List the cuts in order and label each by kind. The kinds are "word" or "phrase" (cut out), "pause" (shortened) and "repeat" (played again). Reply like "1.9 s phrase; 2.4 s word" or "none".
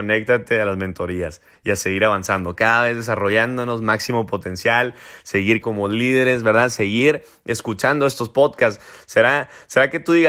5.6 s word